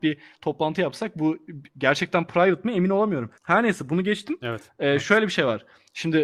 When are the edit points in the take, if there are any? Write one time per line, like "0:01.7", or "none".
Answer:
0:03.4